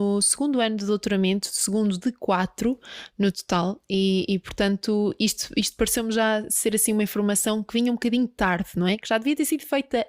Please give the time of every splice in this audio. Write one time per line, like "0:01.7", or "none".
none